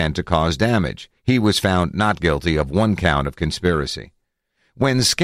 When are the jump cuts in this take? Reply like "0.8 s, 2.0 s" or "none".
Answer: 1.2 s